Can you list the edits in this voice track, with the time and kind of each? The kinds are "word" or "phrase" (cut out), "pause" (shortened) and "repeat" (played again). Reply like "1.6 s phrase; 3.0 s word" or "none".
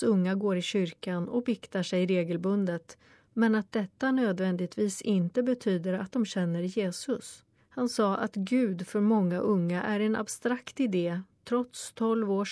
7.6 s pause

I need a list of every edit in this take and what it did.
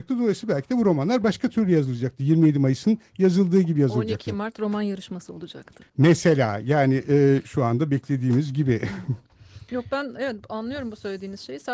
5.9 s pause

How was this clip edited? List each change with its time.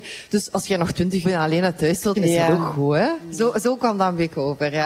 1.2 s phrase; 2.2 s word

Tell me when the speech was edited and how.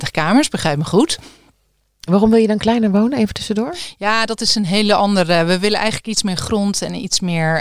none

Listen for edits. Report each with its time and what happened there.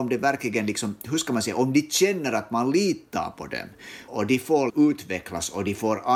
4.1 s word; 4.7 s word

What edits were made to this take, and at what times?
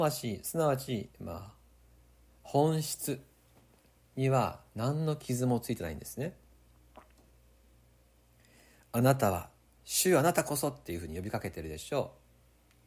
9.8 s word

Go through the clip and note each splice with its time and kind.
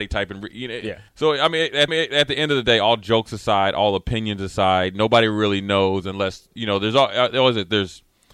1.1 s pause; 1.9 s repeat

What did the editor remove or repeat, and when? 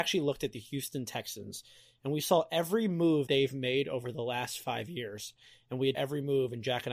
3.3 s word; 5.9 s word

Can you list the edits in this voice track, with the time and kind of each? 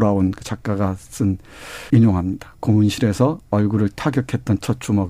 1.9 s word

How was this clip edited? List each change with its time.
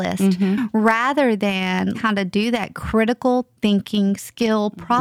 1.9 s word

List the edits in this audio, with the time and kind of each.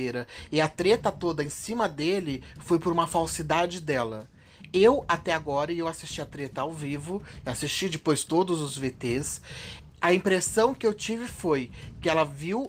none

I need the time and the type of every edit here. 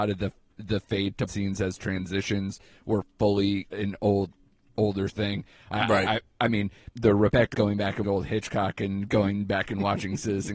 1.3 s phrase; 3.7 s word; 5.1 s word; 6.9 s word; 7.5 s word; 8.0 s word

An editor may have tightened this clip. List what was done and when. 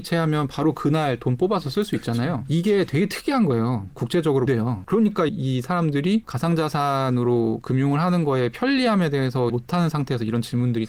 4.5 s phrase; 5.3 s word; 9.5 s word

